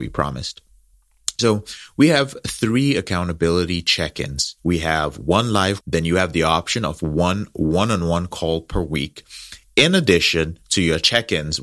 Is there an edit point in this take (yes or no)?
yes